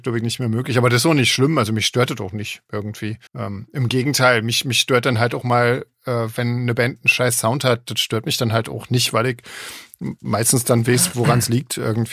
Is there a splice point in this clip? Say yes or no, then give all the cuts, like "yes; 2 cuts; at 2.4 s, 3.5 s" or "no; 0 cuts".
yes; 1 cut; at 3.3 s